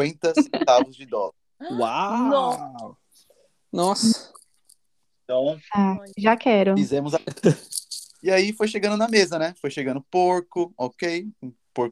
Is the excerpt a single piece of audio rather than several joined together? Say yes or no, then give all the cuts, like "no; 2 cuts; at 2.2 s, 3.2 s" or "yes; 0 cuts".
no; 3 cuts; at 1.4 s, 6.1 s, 8.1 s